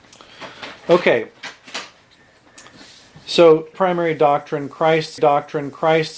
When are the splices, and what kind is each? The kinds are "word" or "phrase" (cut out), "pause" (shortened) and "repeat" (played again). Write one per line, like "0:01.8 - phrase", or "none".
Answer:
0:03.7 - word
0:05.2 - repeat